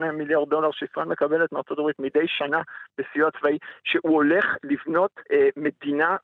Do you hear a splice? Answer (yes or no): yes